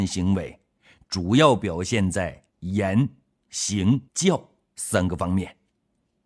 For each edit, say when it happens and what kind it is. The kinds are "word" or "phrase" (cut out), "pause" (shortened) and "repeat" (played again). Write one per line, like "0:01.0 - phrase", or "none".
0:02.5 - pause
0:04.1 - pause